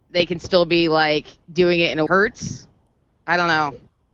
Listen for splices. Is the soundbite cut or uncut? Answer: cut